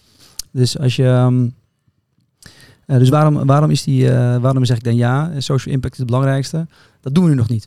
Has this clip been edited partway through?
no; 0 cuts

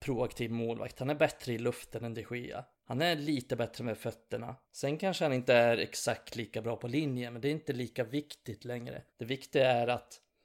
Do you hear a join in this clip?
yes; 3 cuts; at 2.7 s, 4.6 s, 9.1 s

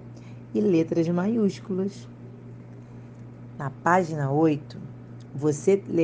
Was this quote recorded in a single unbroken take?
yes; 0 cuts

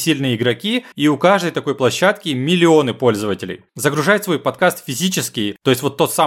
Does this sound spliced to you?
yes; 2 cuts; at 0.9 s, 3.7 s

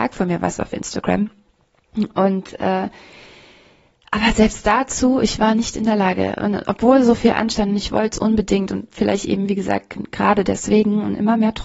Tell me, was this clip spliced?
no; 0 cuts

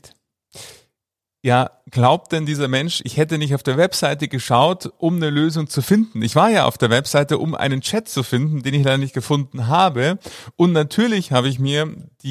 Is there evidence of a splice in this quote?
no; 0 cuts

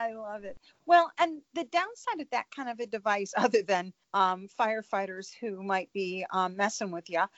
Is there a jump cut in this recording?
yes; 1 cut; at 4.0 s

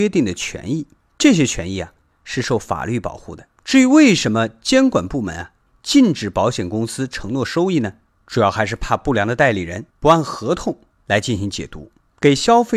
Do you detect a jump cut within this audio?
yes; 2 cuts; at 3.5 s, 9.9 s

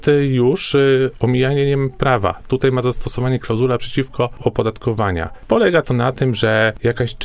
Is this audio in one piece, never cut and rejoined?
no; 1 cut; at 4.4 s

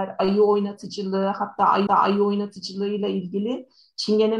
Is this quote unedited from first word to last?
no; 1 cut; at 1.9 s

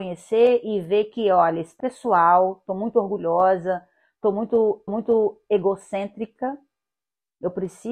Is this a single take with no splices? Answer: no; 2 cuts; at 1.8 s, 4.9 s

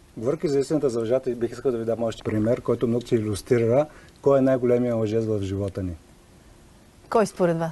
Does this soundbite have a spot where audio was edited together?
yes; 2 cuts; at 2.2 s, 3.0 s

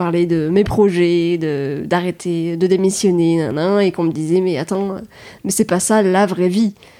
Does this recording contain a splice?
no; 0 cuts

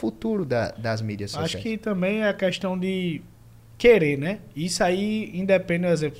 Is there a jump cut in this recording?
no; 0 cuts

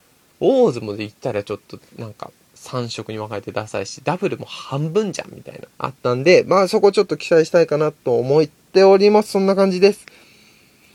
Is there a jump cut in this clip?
yes; 1 cut; at 5.7 s

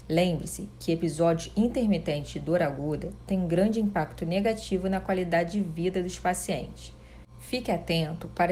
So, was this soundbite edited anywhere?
no; 0 cuts

